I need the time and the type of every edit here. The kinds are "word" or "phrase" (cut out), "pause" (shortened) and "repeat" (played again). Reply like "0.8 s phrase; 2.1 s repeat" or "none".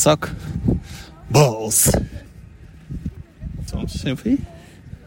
3.7 s word